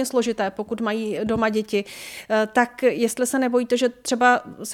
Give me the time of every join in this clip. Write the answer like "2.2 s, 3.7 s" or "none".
none